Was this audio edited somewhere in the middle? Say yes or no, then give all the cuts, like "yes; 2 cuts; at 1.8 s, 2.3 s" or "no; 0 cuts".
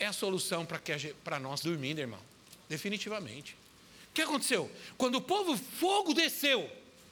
yes; 3 cuts; at 1.6 s, 2.6 s, 5.6 s